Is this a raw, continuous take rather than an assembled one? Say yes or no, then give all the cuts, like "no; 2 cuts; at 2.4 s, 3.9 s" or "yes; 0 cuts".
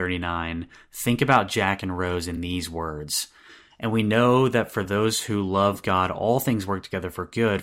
yes; 0 cuts